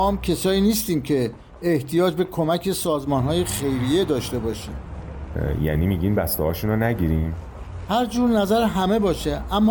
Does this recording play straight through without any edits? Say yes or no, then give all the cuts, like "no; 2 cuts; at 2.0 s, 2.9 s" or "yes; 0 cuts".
yes; 0 cuts